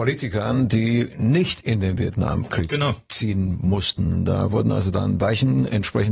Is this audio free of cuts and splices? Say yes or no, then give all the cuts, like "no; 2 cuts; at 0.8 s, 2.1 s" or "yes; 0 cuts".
yes; 0 cuts